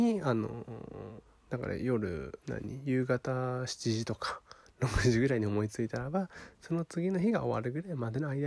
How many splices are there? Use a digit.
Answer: 2